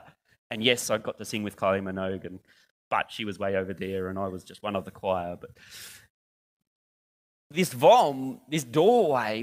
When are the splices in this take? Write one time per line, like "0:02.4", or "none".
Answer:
none